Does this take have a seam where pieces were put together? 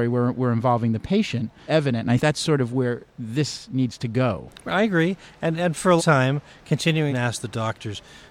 yes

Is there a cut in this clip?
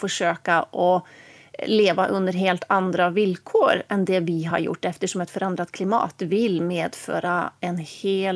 no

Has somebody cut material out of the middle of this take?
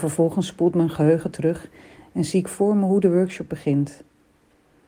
no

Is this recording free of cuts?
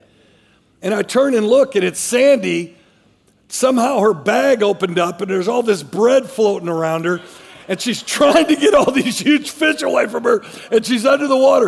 yes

